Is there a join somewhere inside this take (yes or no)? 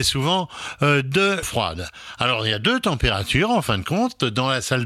yes